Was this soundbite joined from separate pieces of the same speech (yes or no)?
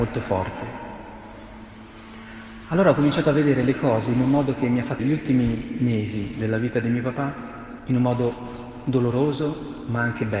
yes